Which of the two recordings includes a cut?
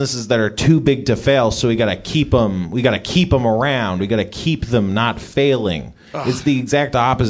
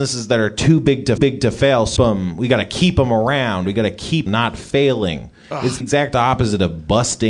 second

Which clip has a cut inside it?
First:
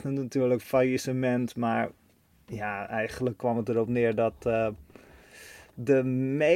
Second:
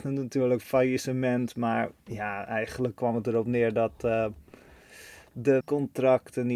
second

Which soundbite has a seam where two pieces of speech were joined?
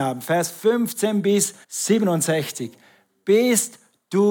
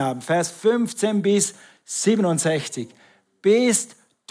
first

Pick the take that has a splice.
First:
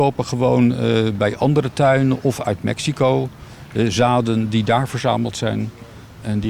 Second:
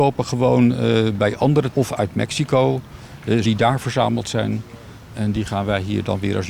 second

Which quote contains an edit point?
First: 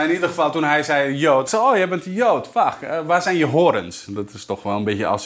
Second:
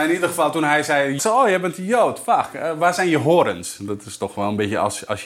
second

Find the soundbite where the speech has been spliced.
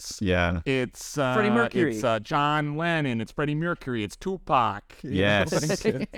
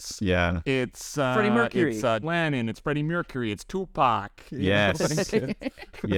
second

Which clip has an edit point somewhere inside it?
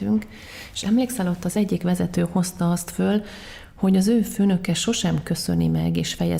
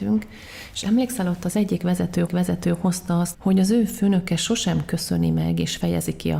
second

